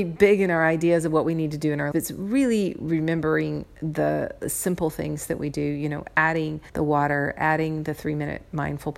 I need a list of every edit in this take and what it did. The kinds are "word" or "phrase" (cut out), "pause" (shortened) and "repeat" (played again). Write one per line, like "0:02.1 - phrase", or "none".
0:01.9 - word
0:06.7 - pause